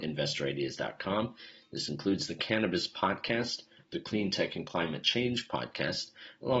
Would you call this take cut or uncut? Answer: uncut